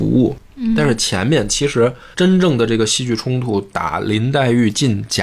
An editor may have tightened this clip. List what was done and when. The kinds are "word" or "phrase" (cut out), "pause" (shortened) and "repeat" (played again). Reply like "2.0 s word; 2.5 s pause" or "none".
2.1 s pause